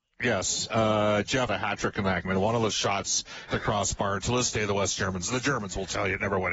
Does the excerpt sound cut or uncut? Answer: cut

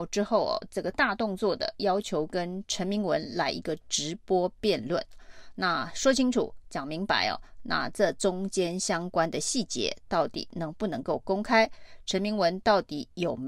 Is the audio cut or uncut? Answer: uncut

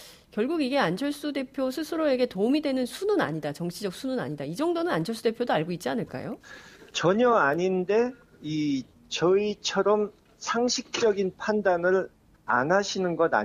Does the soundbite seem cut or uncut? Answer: uncut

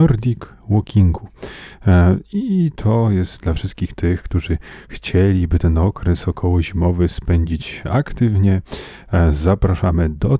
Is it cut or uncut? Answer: uncut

